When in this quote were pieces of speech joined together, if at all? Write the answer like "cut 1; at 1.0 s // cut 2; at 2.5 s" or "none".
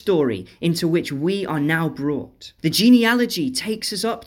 cut 1; at 2.6 s